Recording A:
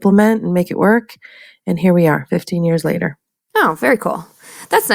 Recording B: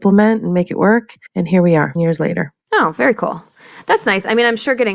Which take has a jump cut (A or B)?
B